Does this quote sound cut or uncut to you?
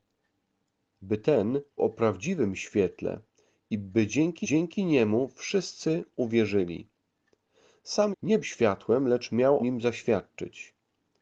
cut